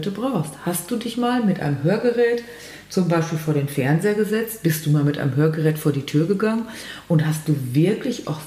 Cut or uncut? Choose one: uncut